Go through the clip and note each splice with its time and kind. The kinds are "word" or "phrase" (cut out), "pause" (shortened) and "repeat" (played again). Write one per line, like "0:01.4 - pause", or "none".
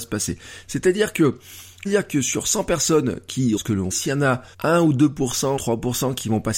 0:01.9 - phrase
0:03.6 - word
0:03.9 - word
0:04.5 - pause
0:05.6 - word